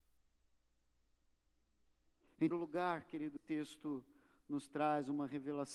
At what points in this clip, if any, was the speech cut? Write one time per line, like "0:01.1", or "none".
0:02.5
0:03.4